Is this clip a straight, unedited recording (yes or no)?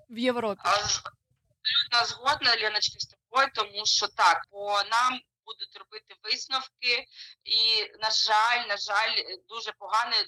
no